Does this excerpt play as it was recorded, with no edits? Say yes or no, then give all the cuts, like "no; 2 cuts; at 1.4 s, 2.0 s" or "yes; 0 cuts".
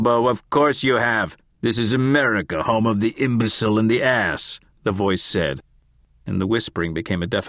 yes; 0 cuts